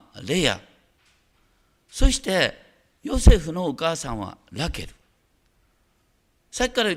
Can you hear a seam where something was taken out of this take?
no; 0 cuts

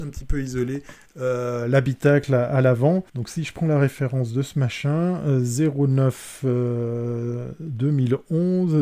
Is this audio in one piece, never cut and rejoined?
no; 1 cut; at 3.1 s

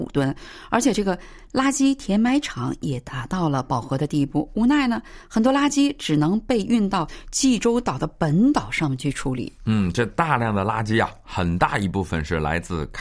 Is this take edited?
no; 0 cuts

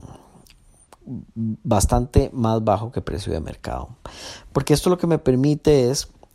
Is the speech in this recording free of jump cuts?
yes; 0 cuts

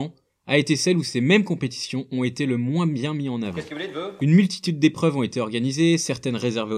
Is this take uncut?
yes; 0 cuts

